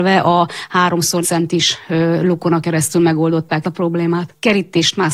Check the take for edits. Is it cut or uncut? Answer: cut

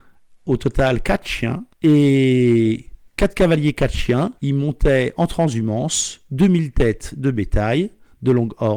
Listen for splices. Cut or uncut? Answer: cut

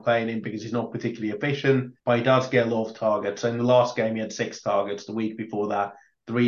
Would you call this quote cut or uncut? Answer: cut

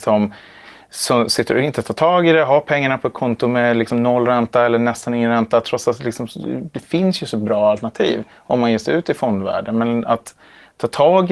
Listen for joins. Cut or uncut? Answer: uncut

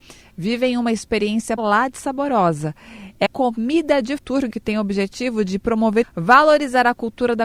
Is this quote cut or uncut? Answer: cut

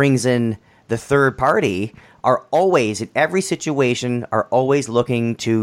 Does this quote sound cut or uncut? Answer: uncut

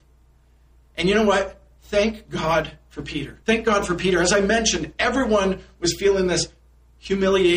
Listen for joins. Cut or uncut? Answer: cut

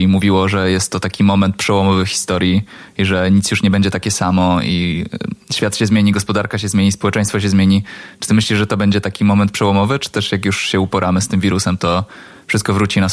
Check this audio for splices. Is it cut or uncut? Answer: uncut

